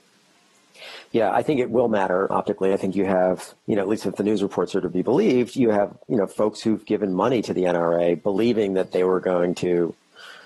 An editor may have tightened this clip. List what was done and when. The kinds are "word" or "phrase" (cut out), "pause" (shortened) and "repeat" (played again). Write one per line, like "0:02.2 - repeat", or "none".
0:02.3 - word
0:03.6 - pause

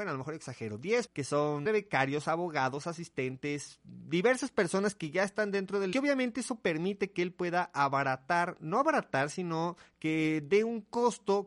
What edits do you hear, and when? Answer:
0:01.1 - word
0:01.7 - word
0:05.9 - phrase

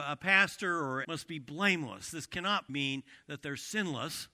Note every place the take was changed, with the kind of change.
0:01.0 - word
0:02.7 - word

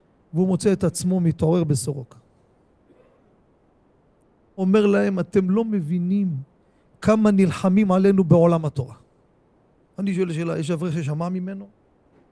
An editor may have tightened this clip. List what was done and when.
none

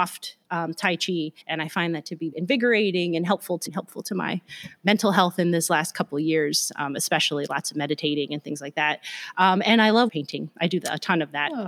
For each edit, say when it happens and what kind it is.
0:01.4 - pause
0:02.3 - word
0:03.7 - word
0:10.1 - word

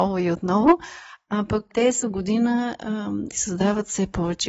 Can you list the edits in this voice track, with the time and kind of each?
0:01.7 - word
0:02.0 - word
0:03.3 - word

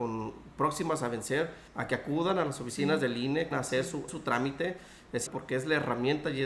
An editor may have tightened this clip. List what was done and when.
0:01.7 - pause
0:03.5 - phrase
0:04.1 - word
0:05.3 - word

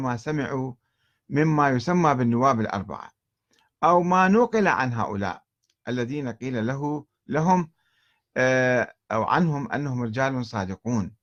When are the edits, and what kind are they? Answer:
none

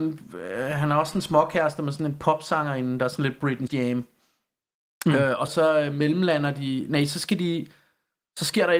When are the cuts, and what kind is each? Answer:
0:03.7 - word
0:05.5 - word

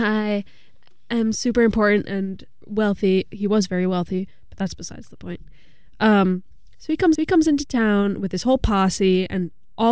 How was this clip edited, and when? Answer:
0:07.2 - repeat

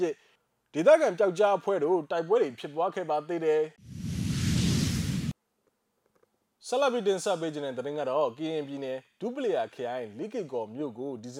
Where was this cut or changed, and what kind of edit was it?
0:03.8 - pause

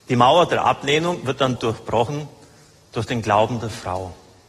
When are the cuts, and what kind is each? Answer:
0:01.6 - word

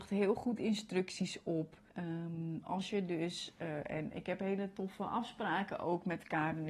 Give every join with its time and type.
0:01.9 - pause

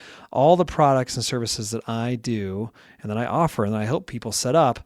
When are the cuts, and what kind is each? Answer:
none

